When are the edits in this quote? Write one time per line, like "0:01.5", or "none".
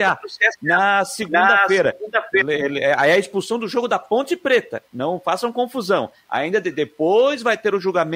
0:04.9